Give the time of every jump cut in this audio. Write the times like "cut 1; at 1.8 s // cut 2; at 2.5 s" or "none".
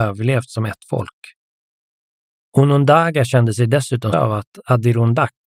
cut 1; at 4.1 s